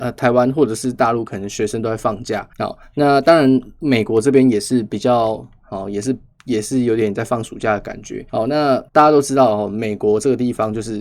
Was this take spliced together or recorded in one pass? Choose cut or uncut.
cut